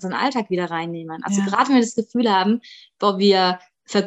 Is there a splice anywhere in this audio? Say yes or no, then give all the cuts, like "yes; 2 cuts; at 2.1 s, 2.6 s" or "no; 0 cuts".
no; 0 cuts